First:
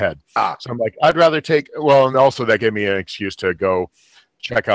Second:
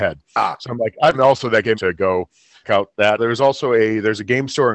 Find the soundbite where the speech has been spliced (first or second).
second